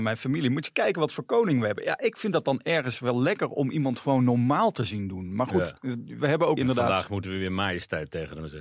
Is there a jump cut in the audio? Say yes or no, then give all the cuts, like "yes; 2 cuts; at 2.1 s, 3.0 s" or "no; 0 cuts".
yes; 1 cut; at 6.6 s